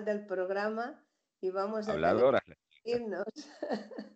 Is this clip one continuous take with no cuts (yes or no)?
yes